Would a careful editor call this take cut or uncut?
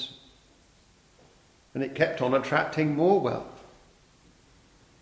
uncut